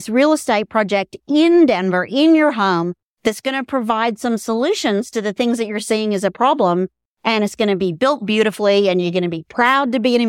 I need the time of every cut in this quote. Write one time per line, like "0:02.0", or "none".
none